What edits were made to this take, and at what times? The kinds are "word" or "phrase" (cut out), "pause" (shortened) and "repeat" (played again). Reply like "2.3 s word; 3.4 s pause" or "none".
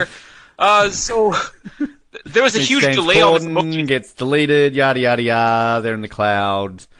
none